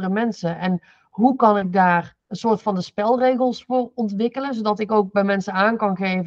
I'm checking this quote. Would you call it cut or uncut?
cut